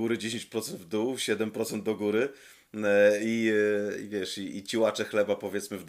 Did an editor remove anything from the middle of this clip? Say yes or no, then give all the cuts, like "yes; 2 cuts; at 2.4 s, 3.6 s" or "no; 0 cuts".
no; 0 cuts